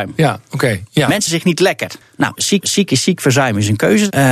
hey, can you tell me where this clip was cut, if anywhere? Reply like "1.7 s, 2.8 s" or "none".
1.3 s, 2.6 s